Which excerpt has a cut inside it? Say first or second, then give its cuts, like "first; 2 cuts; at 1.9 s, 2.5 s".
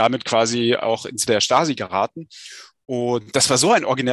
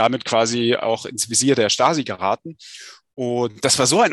first; 1 cut; at 1.3 s